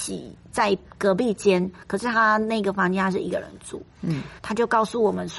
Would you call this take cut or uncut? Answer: cut